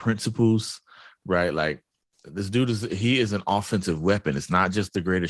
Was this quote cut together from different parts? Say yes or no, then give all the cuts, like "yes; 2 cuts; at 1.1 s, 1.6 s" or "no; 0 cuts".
no; 0 cuts